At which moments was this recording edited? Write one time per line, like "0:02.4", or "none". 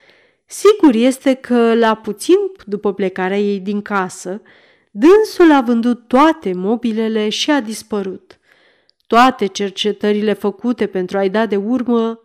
0:02.6